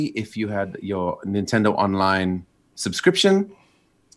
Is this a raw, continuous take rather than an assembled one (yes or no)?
yes